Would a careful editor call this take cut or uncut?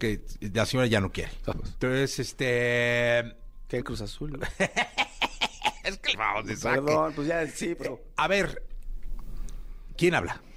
cut